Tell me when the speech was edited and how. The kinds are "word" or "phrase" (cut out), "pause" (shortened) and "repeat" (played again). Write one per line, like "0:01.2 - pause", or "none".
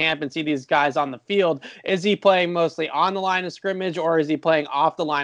none